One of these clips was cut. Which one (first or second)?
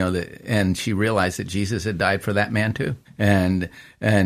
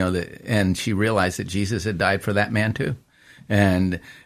first